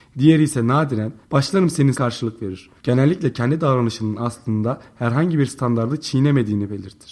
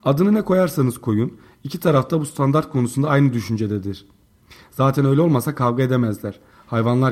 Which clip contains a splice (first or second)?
first